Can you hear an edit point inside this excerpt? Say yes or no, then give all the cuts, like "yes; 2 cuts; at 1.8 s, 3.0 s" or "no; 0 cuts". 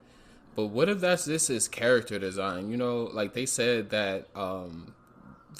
no; 0 cuts